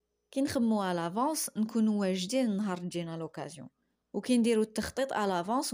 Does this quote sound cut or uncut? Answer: cut